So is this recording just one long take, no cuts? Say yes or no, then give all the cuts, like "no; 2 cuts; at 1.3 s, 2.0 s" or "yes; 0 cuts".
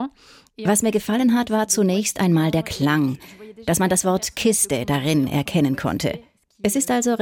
yes; 0 cuts